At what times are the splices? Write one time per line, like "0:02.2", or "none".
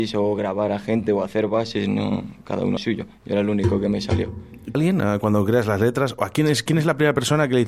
0:02.8
0:04.7